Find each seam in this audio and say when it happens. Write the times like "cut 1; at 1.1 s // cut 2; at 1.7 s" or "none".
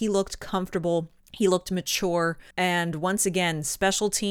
cut 1; at 1.2 s // cut 2; at 2.5 s